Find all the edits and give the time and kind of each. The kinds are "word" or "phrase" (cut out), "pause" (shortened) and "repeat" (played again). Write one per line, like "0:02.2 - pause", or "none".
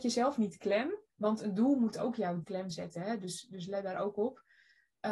0:01.1 - pause
0:02.4 - phrase